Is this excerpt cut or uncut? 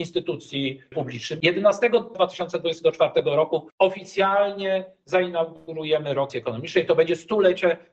cut